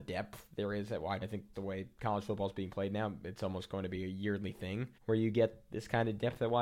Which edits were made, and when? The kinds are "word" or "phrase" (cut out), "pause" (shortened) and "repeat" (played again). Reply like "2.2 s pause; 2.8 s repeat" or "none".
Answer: 1.2 s phrase; 1.5 s word; 5.0 s pause